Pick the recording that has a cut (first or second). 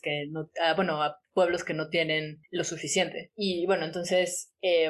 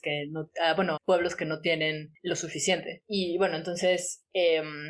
second